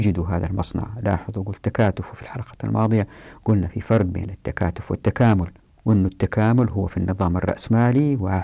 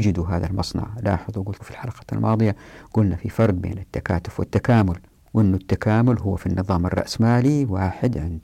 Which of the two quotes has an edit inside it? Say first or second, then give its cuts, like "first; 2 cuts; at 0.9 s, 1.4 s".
second; 1 cut; at 1.6 s